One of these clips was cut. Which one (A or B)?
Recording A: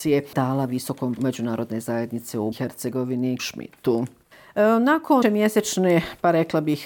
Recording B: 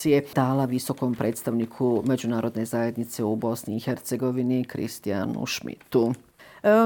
A